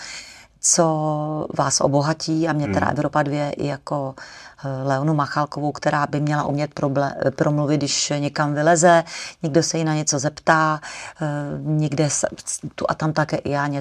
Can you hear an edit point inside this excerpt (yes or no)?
no